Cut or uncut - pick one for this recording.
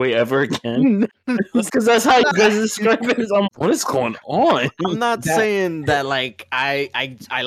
cut